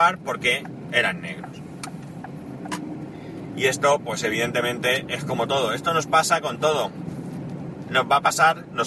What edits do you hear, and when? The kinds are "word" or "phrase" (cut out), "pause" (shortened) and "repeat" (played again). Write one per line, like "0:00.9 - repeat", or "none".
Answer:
none